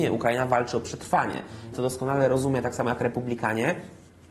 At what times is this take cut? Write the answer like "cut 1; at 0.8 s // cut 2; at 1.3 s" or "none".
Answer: cut 1; at 1.7 s